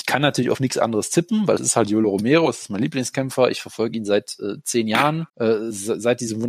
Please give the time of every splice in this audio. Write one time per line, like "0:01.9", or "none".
0:05.3